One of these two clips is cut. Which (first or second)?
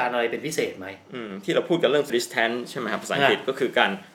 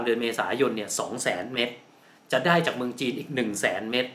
first